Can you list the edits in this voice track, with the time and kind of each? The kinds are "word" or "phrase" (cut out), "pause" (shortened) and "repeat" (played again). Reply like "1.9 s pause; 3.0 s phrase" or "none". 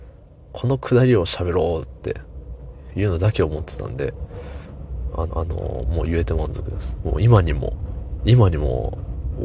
5.3 s repeat